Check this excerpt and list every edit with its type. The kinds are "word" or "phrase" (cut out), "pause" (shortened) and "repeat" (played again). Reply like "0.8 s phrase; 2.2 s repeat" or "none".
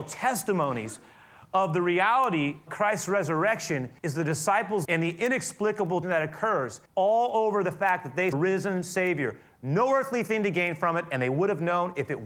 2.7 s word; 4.0 s pause; 4.8 s word; 6.0 s word; 6.9 s pause; 8.3 s phrase